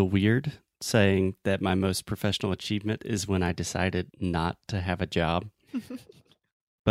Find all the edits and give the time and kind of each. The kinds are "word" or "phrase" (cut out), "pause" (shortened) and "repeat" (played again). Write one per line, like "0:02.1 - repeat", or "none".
0:04.1 - pause